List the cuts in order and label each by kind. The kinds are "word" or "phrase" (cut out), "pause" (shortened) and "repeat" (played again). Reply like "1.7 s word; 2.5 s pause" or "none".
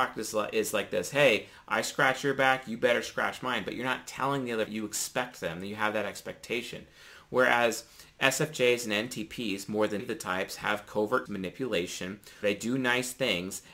4.7 s phrase; 10.0 s word; 11.3 s word; 12.4 s word